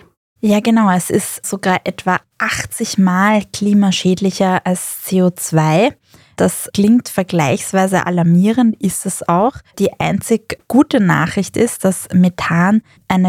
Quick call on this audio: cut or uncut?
uncut